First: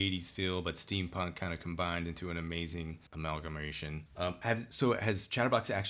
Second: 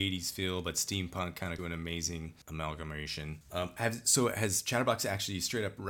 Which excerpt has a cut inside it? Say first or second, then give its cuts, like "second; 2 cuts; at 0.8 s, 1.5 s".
second; 1 cut; at 1.6 s